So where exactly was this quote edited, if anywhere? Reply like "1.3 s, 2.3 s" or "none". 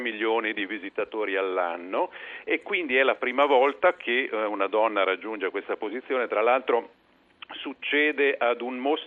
none